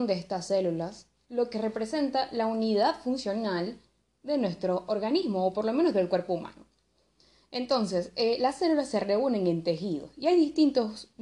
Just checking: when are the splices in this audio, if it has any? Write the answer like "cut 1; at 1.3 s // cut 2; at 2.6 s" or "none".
none